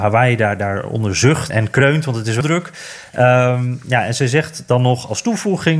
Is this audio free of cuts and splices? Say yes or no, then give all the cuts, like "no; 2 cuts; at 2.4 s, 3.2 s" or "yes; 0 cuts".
no; 2 cuts; at 1.5 s, 2.4 s